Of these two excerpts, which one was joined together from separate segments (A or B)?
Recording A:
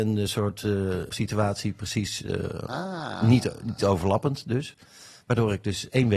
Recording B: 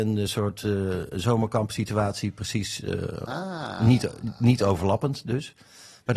A